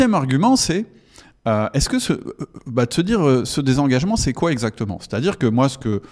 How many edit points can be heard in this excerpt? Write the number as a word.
zero